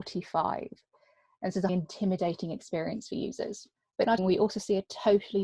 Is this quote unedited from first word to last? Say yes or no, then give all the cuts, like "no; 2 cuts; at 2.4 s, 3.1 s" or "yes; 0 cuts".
no; 3 cuts; at 1.7 s, 3.8 s, 4.2 s